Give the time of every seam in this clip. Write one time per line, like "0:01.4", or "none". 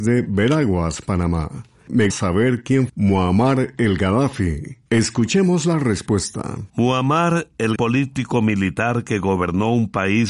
0:02.1
0:02.9
0:04.9
0:06.7
0:07.8